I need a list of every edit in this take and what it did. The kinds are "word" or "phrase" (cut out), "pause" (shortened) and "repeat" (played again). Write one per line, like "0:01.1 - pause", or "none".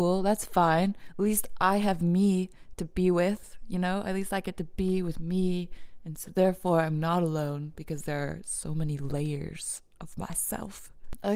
none